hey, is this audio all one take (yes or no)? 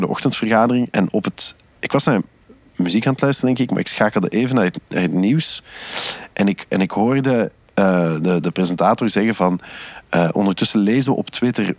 yes